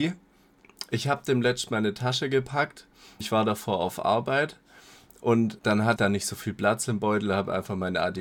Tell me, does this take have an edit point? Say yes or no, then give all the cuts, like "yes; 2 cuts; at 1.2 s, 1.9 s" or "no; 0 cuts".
yes; 3 cuts; at 3.2 s, 5.6 s, 6.0 s